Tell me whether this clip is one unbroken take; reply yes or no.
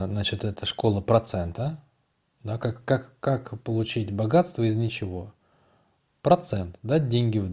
yes